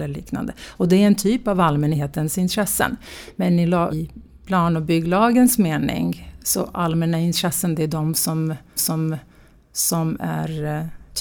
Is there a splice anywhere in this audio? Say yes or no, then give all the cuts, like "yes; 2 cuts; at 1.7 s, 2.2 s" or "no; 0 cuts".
yes; 2 cuts; at 3.9 s, 8.8 s